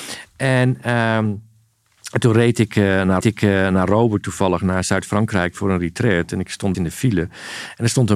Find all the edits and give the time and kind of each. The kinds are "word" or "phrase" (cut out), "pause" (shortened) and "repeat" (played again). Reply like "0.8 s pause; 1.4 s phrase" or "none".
3.2 s repeat; 6.7 s phrase